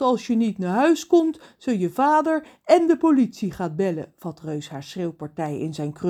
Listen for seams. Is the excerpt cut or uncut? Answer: uncut